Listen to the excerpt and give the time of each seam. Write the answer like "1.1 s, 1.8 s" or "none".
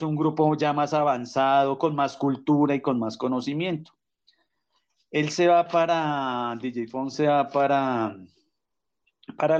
none